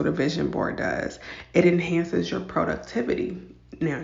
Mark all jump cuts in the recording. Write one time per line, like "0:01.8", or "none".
none